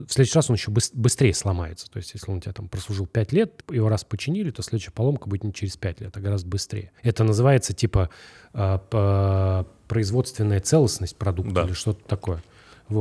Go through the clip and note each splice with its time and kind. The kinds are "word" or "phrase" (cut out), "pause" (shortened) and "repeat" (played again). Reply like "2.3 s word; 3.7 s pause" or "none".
3.6 s word; 7.0 s pause

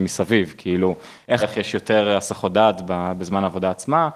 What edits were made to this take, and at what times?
1.4 s phrase

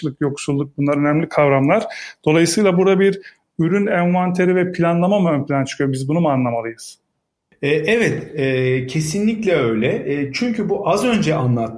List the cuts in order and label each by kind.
none

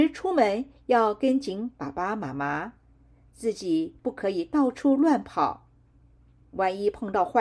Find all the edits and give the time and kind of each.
none

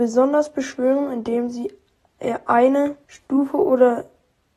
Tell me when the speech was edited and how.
3.0 s pause

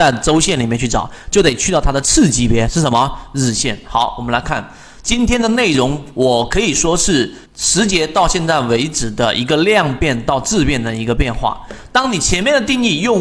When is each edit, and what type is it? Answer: 7.5 s pause

